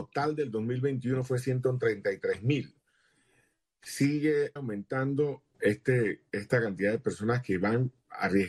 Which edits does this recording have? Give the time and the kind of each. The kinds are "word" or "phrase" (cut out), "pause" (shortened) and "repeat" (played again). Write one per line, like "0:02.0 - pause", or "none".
0:04.6 - word
0:05.5 - word